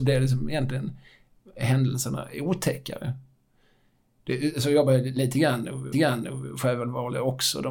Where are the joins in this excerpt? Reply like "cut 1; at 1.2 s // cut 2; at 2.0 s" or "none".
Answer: cut 1; at 5.9 s